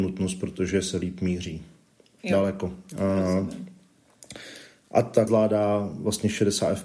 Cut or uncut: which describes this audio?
cut